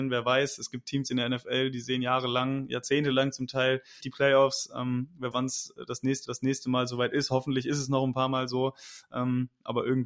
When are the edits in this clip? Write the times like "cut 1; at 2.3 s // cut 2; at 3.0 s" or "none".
cut 1; at 4.0 s // cut 2; at 5.3 s // cut 3; at 6.2 s